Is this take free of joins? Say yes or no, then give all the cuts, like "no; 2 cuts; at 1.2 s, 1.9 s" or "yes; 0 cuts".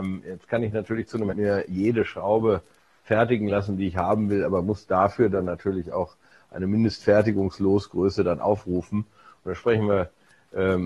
no; 1 cut; at 1.3 s